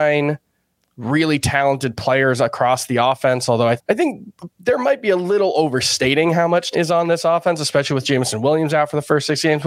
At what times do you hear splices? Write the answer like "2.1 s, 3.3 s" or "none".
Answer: 3.8 s, 6.7 s